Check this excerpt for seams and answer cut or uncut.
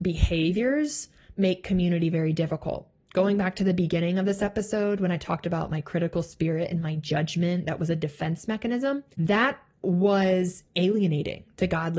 cut